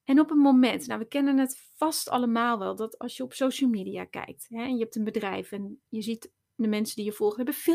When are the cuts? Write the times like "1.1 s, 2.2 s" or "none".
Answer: none